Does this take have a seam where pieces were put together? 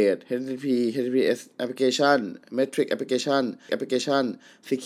yes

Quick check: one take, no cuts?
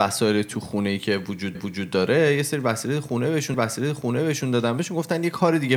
no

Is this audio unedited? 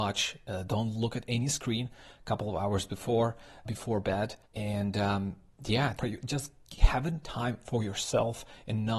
no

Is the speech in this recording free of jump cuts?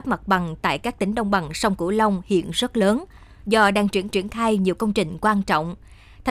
no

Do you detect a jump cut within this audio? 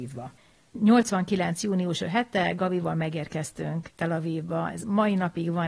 yes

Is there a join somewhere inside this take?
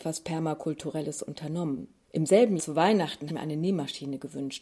yes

